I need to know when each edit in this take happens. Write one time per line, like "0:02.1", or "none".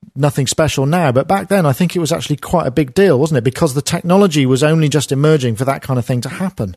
none